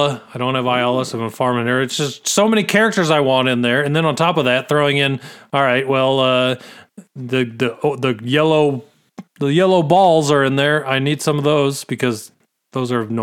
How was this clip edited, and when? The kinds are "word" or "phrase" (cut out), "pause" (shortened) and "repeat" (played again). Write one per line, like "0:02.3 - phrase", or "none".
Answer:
0:09.3 - pause